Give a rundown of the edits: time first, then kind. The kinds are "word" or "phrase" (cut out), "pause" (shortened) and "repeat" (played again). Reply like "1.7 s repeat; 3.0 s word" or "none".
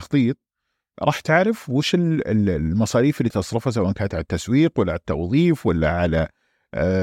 3.3 s word